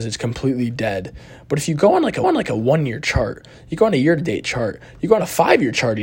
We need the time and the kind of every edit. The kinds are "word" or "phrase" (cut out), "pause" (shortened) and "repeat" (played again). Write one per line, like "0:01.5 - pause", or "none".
0:02.2 - repeat